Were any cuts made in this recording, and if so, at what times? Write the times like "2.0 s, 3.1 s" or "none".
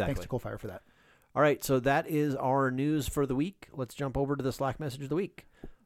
none